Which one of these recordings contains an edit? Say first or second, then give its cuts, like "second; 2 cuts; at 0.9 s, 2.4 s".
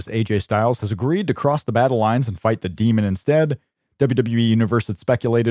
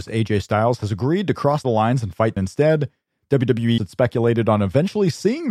second; 3 cuts; at 1.6 s, 2.4 s, 3.8 s